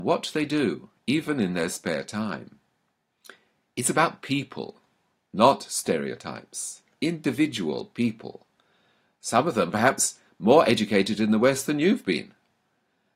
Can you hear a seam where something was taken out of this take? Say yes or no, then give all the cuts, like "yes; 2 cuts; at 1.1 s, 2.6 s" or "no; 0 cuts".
no; 0 cuts